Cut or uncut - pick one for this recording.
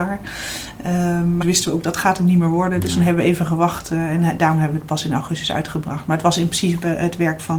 cut